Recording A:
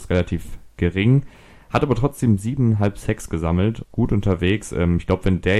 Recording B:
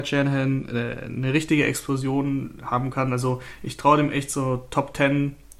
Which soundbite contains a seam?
A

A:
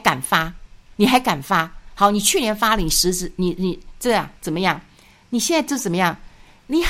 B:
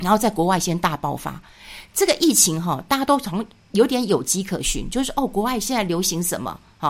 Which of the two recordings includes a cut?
A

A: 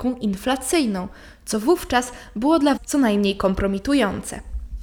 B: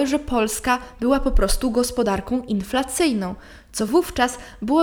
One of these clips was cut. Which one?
A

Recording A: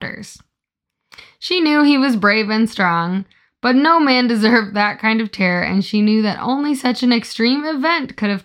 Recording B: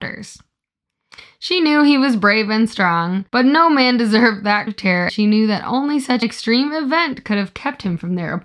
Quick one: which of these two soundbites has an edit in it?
B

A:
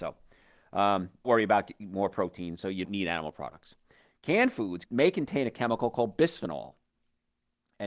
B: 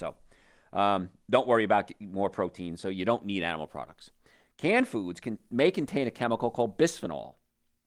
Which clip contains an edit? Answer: A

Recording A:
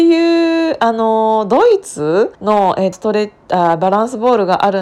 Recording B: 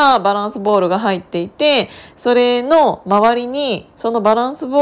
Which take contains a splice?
A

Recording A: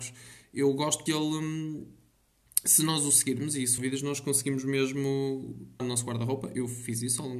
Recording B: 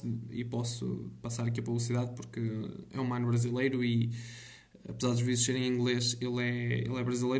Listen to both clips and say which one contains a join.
A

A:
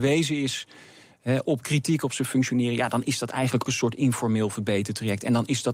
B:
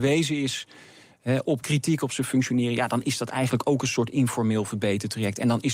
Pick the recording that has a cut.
A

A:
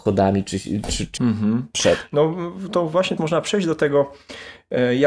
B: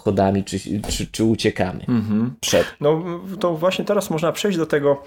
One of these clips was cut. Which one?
A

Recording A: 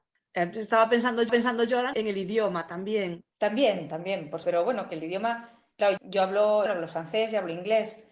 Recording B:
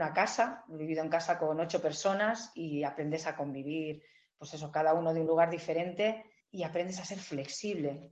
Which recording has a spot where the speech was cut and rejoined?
A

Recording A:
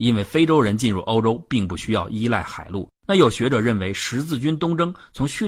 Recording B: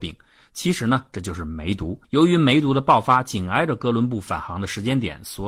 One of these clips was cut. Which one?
B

